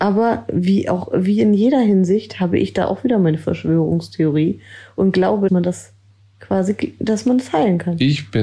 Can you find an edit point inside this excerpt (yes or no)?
yes